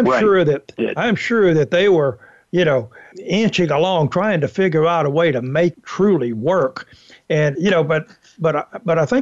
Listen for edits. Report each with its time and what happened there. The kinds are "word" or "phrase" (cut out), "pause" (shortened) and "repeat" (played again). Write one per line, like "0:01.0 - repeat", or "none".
0:03.1 - word
0:05.7 - word
0:07.5 - word